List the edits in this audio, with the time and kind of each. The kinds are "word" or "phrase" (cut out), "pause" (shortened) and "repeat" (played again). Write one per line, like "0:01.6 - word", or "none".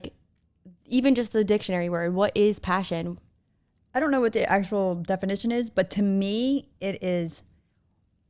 none